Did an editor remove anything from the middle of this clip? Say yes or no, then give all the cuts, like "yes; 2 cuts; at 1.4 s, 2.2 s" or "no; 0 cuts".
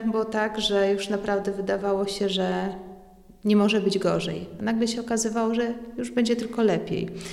no; 0 cuts